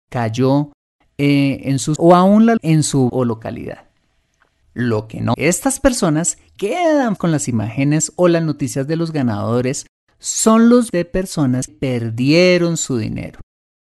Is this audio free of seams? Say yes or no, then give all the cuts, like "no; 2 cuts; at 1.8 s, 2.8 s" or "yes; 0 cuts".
no; 8 cuts; at 2.0 s, 2.6 s, 3.1 s, 5.3 s, 6.6 s, 7.2 s, 10.9 s, 11.7 s